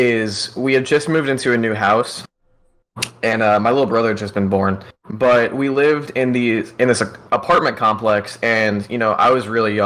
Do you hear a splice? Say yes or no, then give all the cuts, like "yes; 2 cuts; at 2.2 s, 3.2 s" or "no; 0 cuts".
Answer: yes; 1 cut; at 5.0 s